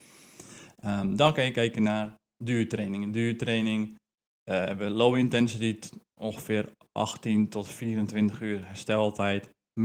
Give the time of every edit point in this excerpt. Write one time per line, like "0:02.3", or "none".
none